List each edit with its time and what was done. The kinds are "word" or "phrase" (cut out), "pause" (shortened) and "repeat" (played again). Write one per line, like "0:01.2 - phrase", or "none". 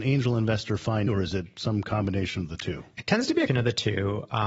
0:01.1 - word
0:03.5 - word